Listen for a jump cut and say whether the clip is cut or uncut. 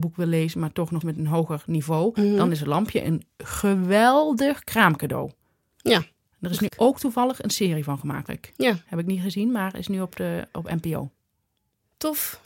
cut